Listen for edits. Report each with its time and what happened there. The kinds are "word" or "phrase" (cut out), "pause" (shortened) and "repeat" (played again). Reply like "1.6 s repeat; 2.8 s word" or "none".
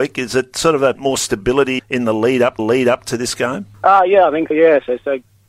0.9 s word; 1.8 s word; 2.6 s repeat; 3.7 s pause; 4.5 s word